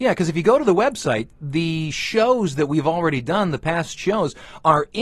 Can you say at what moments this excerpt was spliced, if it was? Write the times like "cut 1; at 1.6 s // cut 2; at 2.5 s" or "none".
none